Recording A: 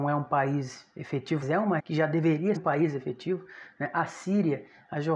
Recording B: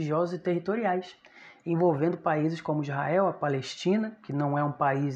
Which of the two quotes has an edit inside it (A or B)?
A